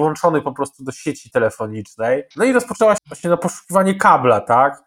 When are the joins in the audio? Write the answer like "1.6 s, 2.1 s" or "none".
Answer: 2.3 s, 3.0 s